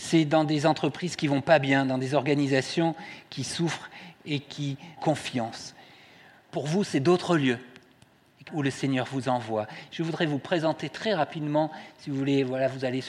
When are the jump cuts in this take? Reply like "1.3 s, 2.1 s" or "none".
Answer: 5.0 s, 8.5 s